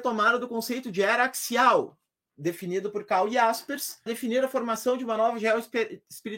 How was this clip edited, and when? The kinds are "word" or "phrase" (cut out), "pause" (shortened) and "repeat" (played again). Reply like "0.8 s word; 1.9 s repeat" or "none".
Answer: 4.1 s word